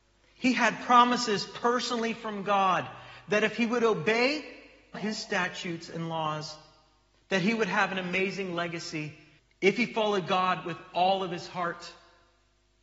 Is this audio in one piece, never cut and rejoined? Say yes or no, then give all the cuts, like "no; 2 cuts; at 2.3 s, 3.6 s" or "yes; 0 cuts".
no; 1 cut; at 4.9 s